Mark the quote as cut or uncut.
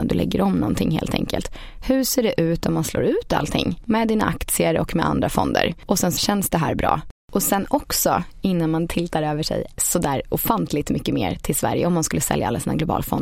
cut